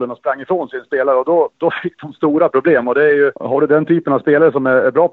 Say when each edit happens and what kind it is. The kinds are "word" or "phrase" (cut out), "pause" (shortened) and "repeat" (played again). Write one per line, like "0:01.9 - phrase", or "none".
0:03.4 - pause